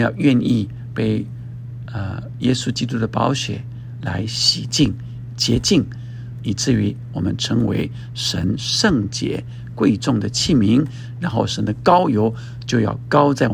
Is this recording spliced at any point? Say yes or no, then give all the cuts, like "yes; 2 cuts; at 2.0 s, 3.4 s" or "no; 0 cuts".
no; 0 cuts